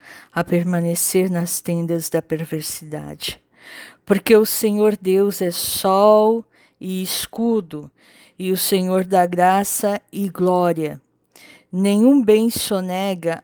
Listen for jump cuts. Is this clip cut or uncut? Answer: uncut